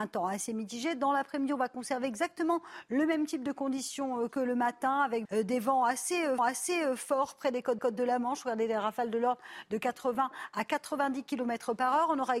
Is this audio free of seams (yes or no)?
no